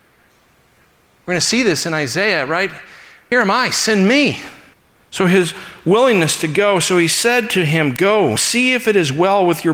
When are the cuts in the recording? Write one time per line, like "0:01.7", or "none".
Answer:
0:03.3
0:04.7
0:08.4